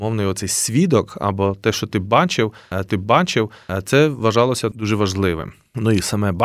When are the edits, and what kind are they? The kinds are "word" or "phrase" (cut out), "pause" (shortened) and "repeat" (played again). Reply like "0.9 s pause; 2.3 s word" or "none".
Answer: 2.9 s repeat